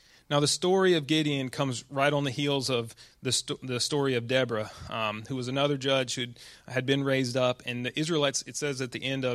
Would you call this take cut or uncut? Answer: uncut